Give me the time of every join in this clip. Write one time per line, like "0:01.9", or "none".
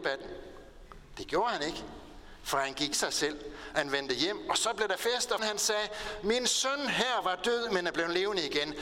0:02.9
0:05.4